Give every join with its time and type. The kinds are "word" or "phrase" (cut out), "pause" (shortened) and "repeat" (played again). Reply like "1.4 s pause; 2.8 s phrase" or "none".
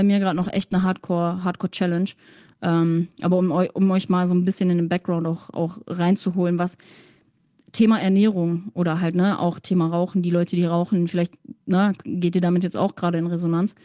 none